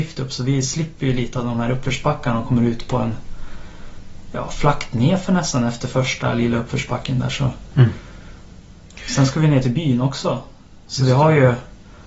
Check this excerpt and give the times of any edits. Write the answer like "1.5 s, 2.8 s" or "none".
none

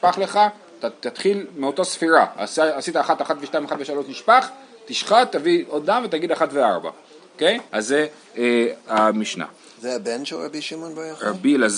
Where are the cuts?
1.5 s, 7.7 s

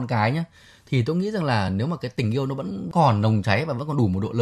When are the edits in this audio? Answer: none

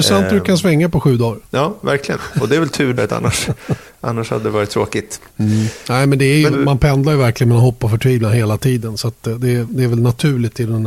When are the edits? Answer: 1.5 s, 3.0 s, 5.3 s, 6.5 s

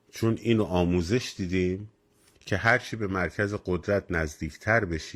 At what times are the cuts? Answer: none

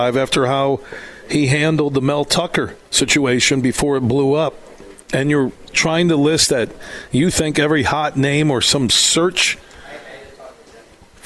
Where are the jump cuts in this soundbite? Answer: 2.8 s, 5.0 s

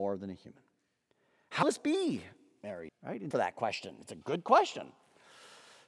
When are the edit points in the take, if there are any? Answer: 1.6 s, 2.9 s, 3.3 s

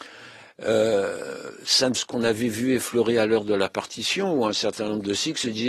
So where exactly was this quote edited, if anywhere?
1.9 s

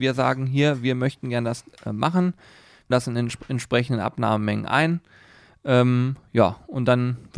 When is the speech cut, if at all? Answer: 2.9 s

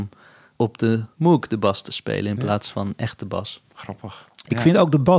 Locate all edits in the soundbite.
none

